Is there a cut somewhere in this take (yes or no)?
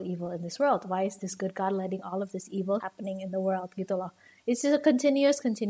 yes